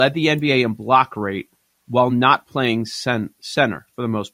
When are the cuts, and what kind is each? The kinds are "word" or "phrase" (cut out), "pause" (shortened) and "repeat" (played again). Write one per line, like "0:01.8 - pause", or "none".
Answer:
none